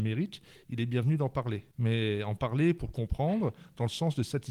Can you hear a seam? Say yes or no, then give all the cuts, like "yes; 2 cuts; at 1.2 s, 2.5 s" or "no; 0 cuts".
no; 0 cuts